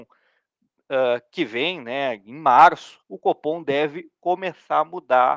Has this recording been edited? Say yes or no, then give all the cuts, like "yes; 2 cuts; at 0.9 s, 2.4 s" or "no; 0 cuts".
yes; 1 cut; at 3.0 s